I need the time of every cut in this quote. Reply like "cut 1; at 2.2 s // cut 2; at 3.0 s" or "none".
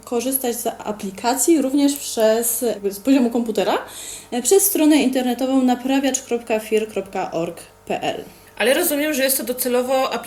cut 1; at 8.5 s